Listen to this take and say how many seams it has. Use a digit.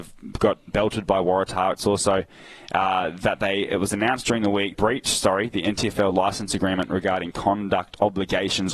1